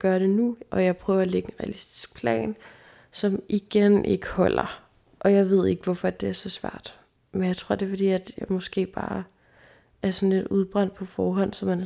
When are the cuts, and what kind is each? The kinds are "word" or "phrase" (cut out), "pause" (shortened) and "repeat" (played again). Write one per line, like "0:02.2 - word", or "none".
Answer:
none

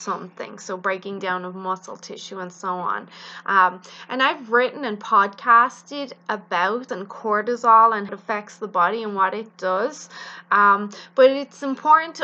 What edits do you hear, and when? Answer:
0:06.9 - word
0:08.1 - word

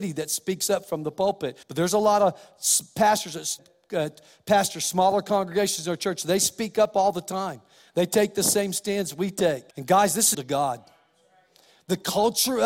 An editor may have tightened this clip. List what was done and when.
0:01.6 - pause
0:03.6 - word
0:09.7 - pause
0:10.3 - phrase

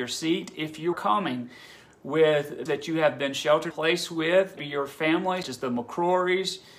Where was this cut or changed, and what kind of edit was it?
0:00.9 - word
0:02.7 - word
0:03.7 - word
0:04.6 - word
0:05.4 - word

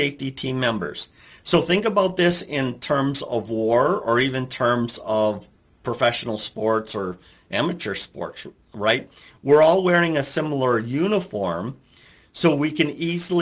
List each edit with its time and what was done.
none

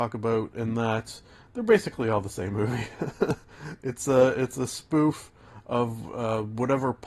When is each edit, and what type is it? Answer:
none

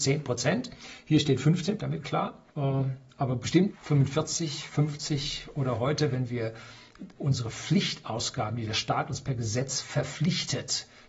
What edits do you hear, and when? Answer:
0:01.8 - phrase
0:02.5 - pause
0:03.7 - word
0:07.2 - word

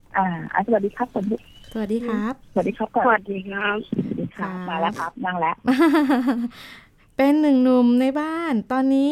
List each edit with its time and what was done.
0:07.0 - pause

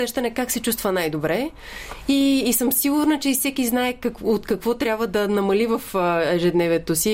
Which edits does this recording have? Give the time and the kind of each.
none

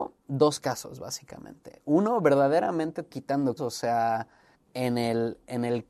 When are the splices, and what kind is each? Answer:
0:03.1 - word
0:03.6 - word
0:04.5 - word

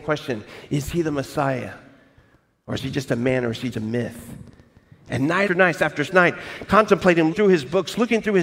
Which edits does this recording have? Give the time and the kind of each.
0:03.7 - word
0:05.5 - word
0:06.1 - word
0:07.3 - word

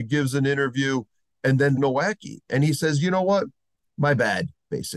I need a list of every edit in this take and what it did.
0:01.8 - phrase

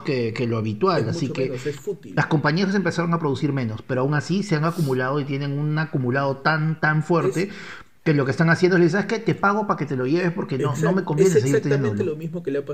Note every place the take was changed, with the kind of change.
none

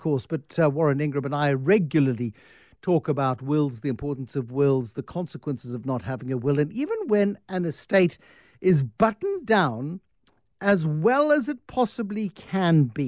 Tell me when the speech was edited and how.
none

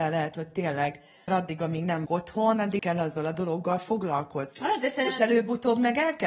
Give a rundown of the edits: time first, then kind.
0:01.3 - phrase
0:02.1 - word
0:02.8 - word

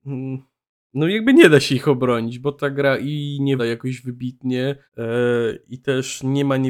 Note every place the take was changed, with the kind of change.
0:03.6 - word
0:04.9 - pause

